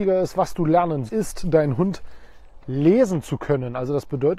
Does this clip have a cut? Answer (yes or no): yes